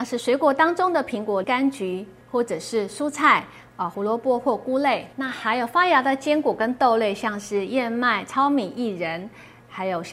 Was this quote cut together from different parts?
yes; 3 cuts; at 1.4 s, 2.2 s, 3.9 s

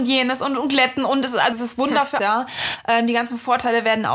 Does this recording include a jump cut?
yes; 2 cuts; at 1.5 s, 2.2 s

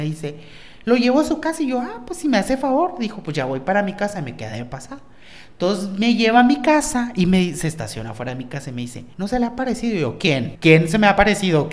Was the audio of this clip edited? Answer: no; 0 cuts

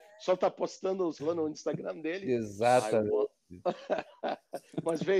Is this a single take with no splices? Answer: no; 1 cut; at 1.2 s

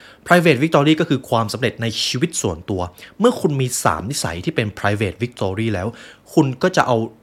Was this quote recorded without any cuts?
yes; 0 cuts

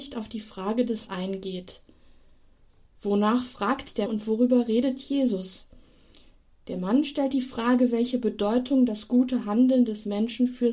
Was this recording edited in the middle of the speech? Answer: yes; 2 cuts; at 1.1 s, 4.1 s

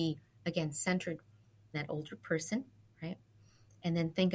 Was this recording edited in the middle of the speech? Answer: yes; 1 cut; at 1.7 s

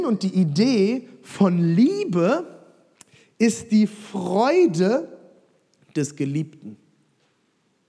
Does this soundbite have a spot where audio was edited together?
no; 0 cuts

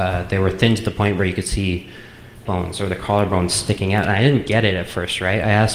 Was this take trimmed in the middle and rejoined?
yes; 1 cut; at 2.5 s

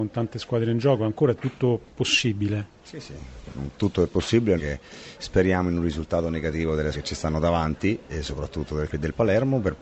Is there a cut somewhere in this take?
yes; 3 cuts; at 4.6 s, 6.9 s, 8.9 s

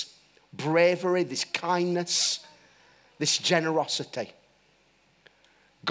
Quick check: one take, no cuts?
yes; 0 cuts

